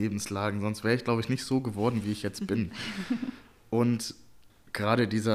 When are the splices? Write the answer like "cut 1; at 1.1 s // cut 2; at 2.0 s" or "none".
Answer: none